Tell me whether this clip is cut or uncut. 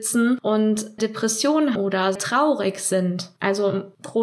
cut